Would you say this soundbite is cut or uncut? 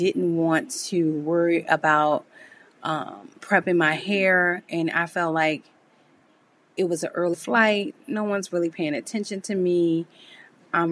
cut